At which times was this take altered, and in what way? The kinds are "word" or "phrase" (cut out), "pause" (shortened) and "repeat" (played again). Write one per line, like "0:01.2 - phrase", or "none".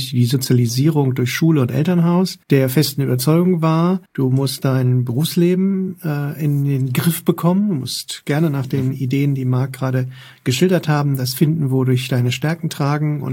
0:02.4 - pause
0:04.1 - pause